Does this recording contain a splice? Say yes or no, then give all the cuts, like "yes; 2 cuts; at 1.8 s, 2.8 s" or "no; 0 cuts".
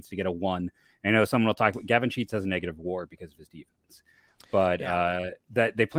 no; 0 cuts